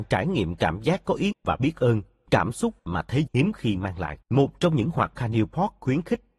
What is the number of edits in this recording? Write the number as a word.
six